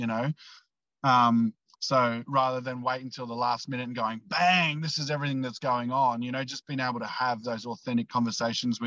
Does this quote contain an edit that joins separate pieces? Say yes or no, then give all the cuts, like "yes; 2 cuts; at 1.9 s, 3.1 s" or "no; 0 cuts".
no; 0 cuts